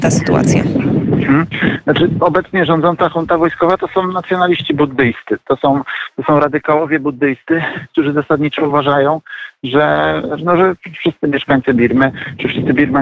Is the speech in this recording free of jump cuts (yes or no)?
yes